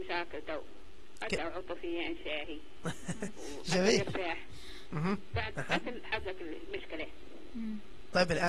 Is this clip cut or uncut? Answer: cut